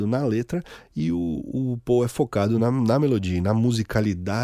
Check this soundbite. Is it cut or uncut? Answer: uncut